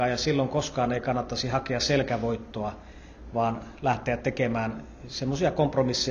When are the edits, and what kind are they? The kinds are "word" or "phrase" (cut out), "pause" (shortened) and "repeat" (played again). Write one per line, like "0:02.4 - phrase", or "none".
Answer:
none